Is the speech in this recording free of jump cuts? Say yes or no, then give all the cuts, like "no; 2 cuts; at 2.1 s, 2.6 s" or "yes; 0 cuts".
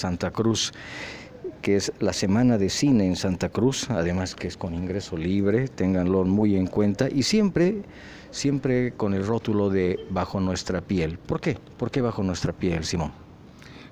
yes; 0 cuts